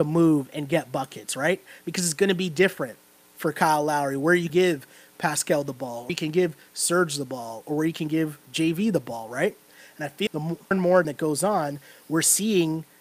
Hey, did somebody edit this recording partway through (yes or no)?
yes